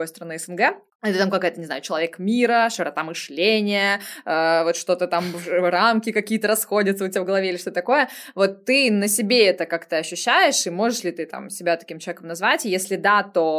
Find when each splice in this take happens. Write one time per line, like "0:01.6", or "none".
none